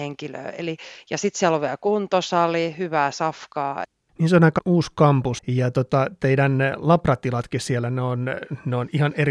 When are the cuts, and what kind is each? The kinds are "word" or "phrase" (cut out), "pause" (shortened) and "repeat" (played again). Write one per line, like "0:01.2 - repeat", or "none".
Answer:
0:04.6 - word
0:05.4 - word